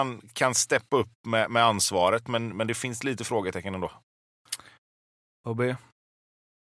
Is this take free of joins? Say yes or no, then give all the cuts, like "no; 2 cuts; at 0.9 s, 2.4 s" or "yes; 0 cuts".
yes; 0 cuts